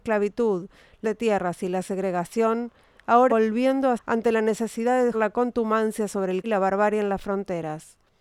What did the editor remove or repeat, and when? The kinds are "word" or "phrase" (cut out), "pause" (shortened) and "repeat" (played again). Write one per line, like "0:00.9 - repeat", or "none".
0:01.0 - word
0:03.3 - word
0:04.0 - word
0:05.1 - word
0:06.4 - word